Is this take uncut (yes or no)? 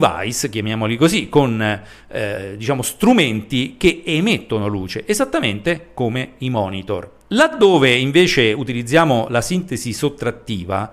yes